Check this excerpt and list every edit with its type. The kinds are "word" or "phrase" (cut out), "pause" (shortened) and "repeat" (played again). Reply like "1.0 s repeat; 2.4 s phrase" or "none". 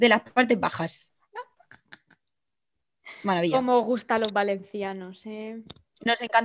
none